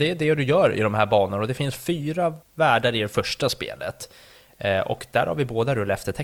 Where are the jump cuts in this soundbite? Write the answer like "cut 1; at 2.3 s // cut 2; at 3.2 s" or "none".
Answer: cut 1; at 2.4 s